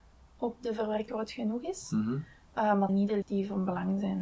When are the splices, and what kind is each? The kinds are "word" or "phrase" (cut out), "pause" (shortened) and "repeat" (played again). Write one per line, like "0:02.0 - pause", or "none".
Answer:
0:01.1 - word
0:02.9 - word
0:03.2 - word